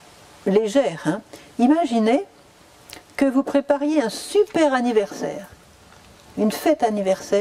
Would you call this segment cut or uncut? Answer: uncut